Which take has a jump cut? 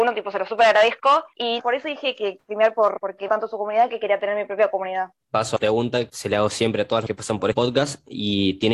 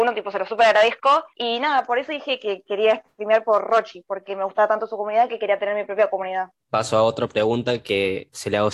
first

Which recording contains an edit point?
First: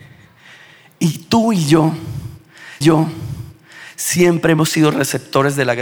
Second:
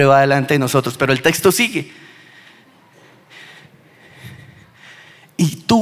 first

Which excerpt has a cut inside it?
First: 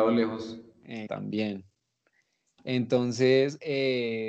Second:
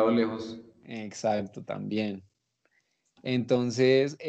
first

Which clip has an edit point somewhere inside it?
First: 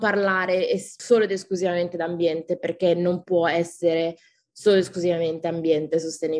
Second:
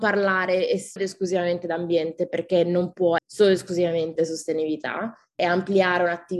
second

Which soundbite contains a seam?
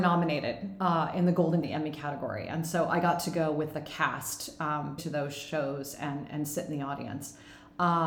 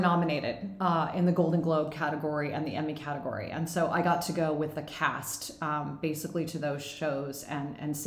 first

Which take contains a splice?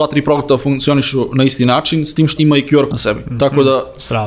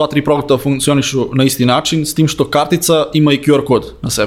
first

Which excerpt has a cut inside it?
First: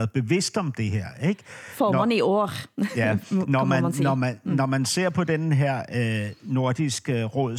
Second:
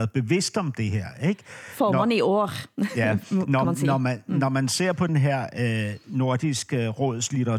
second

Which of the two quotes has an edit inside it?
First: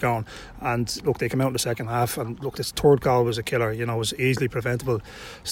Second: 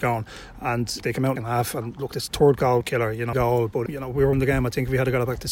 second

